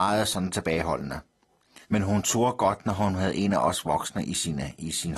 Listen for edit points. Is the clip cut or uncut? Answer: cut